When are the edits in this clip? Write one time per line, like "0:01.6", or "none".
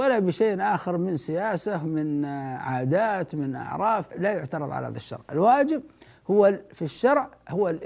0:04.1